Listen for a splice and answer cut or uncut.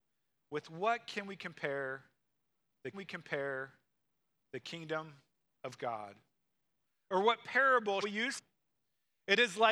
cut